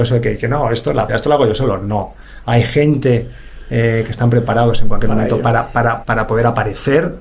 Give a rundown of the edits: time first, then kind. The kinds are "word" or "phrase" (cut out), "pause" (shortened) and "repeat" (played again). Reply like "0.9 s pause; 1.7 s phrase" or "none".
1.1 s word; 6.0 s word